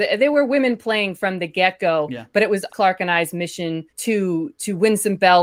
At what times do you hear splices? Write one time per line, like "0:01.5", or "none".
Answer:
0:02.7
0:03.9